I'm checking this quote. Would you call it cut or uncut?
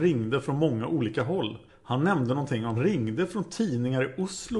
cut